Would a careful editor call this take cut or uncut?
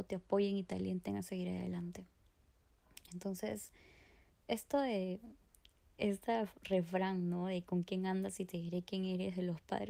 uncut